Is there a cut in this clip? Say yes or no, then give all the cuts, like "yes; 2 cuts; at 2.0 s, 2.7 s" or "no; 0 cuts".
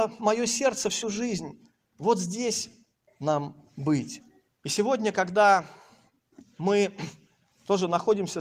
yes; 3 cuts; at 1.0 s, 3.1 s, 4.5 s